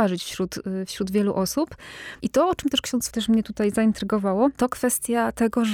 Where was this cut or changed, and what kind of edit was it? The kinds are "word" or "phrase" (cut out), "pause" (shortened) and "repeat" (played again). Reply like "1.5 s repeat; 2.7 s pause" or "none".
2.2 s pause; 3.1 s phrase